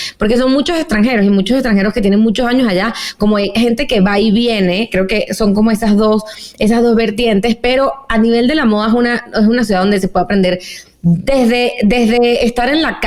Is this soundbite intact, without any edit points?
yes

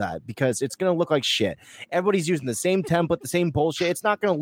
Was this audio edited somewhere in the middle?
no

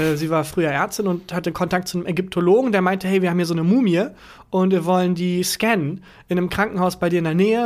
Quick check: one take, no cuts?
yes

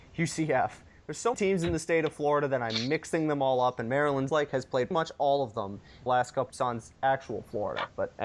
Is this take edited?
yes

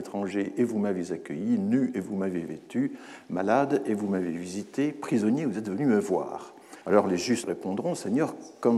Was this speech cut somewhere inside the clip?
yes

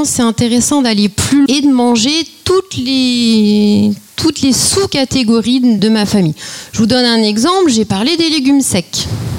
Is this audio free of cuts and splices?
no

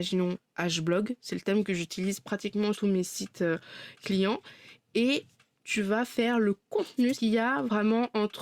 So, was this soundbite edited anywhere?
yes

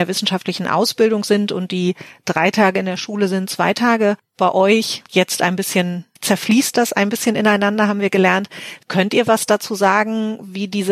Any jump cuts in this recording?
yes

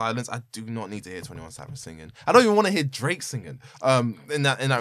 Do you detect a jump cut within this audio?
no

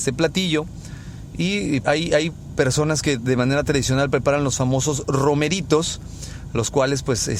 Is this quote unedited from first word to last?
no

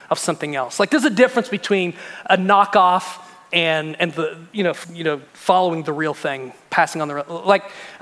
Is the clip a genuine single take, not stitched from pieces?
no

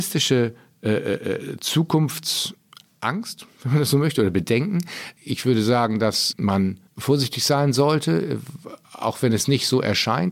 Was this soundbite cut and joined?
yes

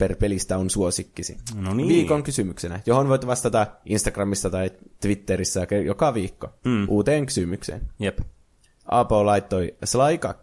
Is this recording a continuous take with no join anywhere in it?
yes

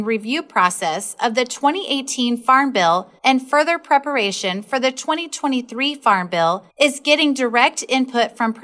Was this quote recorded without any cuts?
no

